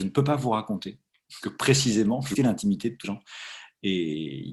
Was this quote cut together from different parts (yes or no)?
yes